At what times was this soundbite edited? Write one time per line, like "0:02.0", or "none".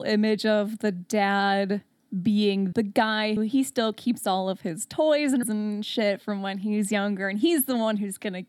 0:02.7
0:03.4
0:05.4